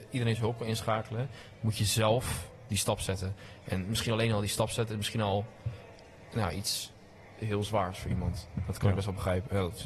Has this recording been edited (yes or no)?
no